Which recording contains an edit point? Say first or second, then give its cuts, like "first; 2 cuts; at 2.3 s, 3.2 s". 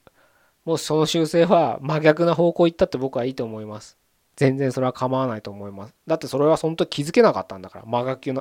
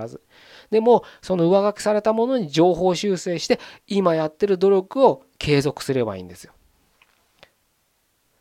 second; 1 cut; at 5.3 s